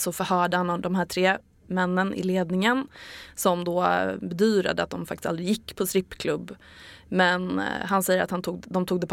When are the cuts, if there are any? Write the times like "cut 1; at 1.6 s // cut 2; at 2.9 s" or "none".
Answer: none